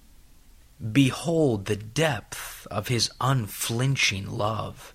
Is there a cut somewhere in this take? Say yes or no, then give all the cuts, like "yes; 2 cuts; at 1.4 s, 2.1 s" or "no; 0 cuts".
no; 0 cuts